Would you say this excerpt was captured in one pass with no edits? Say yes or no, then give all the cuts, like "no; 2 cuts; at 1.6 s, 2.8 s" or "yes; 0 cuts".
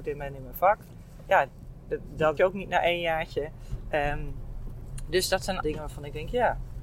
no; 2 cuts; at 2.4 s, 5.6 s